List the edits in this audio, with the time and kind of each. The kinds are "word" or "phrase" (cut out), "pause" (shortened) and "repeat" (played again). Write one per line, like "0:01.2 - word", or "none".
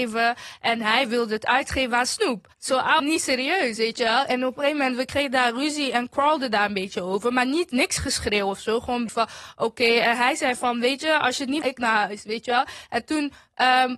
0:02.5 - pause
0:03.0 - phrase
0:09.1 - word
0:11.6 - phrase